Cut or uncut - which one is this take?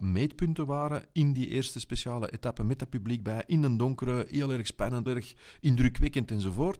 cut